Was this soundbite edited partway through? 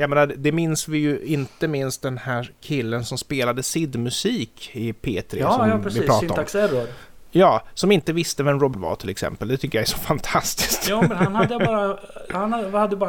yes; 1 cut; at 8.7 s

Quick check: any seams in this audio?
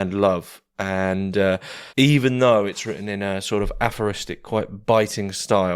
yes; 1 cut; at 1.9 s

